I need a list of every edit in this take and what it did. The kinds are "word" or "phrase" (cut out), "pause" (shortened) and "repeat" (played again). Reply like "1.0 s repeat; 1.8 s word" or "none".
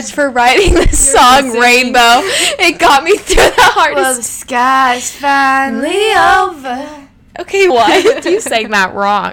7.7 s word